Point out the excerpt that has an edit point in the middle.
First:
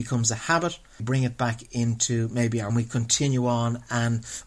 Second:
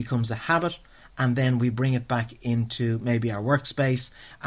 first; 2 cuts; at 1.0 s, 2.7 s

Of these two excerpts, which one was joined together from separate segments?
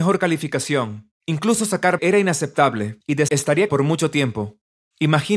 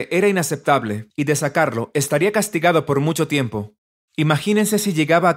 first; 3 cuts; at 2.0 s, 3.3 s, 3.7 s

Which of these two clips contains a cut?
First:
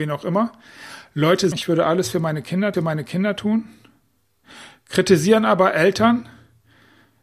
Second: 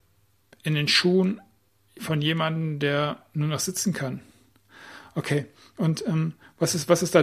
first; 2 cuts; at 1.5 s, 2.7 s

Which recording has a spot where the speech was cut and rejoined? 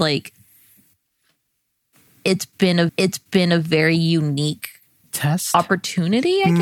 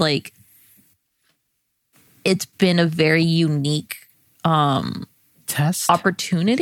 first; 2 cuts; at 2.9 s, 5.0 s

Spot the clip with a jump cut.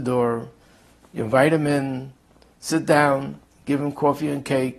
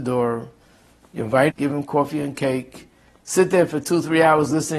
second; 1 cut; at 1.5 s

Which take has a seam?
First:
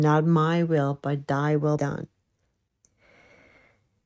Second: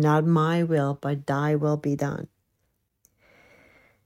first; 1 cut; at 1.8 s

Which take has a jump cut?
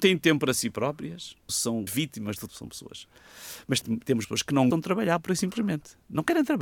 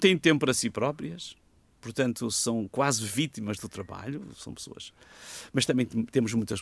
first; 6 cuts; at 1.5 s, 1.9 s, 2.5 s, 3.8 s, 4.2 s, 4.7 s

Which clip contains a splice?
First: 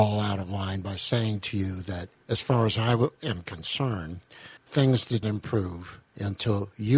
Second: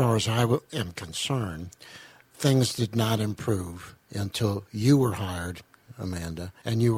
first; 2 cuts; at 4.6 s, 5.2 s

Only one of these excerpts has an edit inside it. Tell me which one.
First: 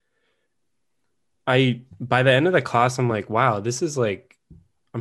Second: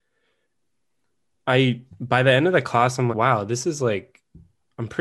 second; 1 cut; at 3.1 s

